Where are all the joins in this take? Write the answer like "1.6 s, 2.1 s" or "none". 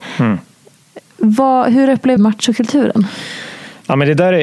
2.2 s